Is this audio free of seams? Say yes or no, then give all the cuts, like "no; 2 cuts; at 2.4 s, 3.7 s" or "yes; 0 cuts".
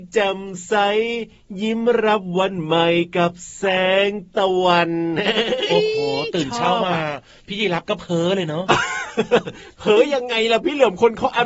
yes; 0 cuts